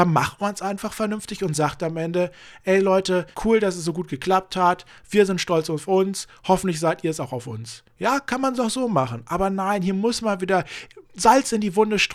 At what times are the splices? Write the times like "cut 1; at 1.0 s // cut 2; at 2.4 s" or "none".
cut 1; at 3.3 s // cut 2; at 11.1 s